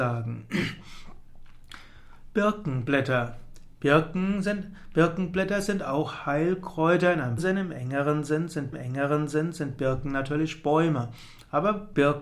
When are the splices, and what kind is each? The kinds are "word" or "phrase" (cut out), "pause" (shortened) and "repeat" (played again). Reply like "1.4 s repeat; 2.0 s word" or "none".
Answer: 7.4 s word; 8.7 s repeat